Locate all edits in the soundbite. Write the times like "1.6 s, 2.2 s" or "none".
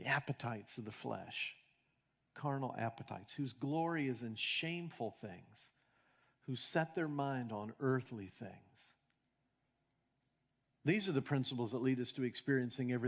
none